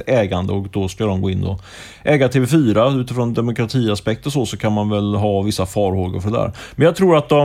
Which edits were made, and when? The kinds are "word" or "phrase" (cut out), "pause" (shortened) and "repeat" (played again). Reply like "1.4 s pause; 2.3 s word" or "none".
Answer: none